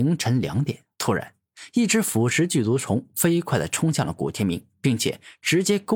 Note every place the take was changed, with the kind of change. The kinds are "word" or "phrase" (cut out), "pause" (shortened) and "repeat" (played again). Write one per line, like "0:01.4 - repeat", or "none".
0:00.9 - pause